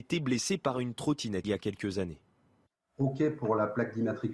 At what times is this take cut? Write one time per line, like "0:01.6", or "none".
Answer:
0:01.4